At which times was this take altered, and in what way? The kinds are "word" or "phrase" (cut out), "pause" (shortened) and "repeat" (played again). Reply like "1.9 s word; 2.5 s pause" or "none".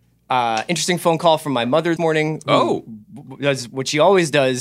2.0 s word